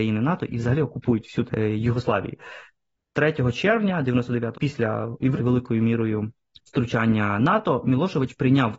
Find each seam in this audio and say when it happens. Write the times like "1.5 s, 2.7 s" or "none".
1.5 s, 4.5 s, 5.4 s, 6.5 s